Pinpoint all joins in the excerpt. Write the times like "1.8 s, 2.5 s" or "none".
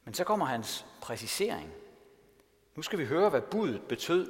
none

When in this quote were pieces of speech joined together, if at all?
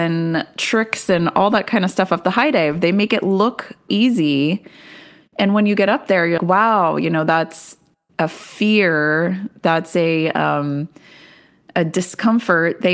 3.9 s, 6.4 s

